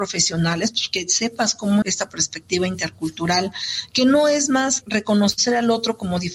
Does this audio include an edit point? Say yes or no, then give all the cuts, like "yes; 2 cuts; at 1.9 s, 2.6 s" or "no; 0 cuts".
yes; 2 cuts; at 1.8 s, 4.8 s